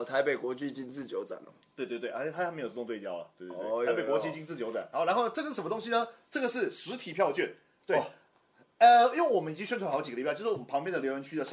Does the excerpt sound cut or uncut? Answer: uncut